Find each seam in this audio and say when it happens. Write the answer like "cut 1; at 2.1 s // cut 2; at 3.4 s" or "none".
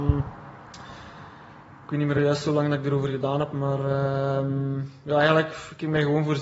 none